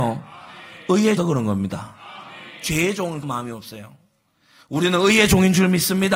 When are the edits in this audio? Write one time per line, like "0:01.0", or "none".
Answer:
0:01.2
0:03.2